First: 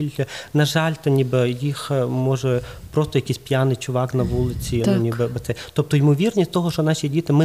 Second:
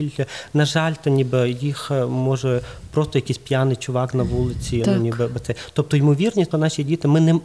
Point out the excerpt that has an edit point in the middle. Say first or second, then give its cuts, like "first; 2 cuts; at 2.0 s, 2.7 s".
second; 1 cut; at 6.5 s